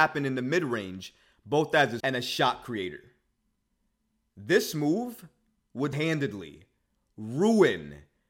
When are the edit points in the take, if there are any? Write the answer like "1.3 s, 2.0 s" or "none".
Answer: 2.0 s, 5.9 s